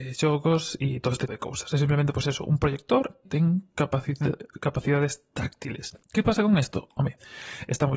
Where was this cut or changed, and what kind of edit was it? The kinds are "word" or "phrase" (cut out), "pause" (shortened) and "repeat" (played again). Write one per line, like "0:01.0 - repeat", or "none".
0:01.3 - word
0:03.3 - word
0:06.0 - pause